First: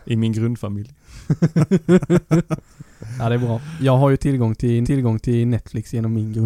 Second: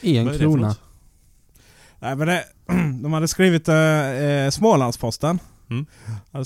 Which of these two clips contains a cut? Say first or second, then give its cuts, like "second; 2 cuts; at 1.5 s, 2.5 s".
first; 1 cut; at 4.8 s